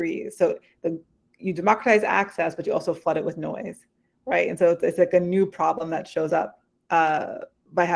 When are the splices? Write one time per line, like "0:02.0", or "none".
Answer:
none